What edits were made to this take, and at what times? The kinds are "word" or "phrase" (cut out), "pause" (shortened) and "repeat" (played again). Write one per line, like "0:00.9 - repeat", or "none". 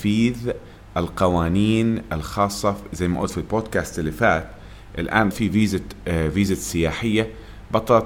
0:05.3 - word